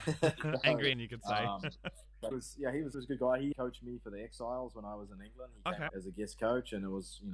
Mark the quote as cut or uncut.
cut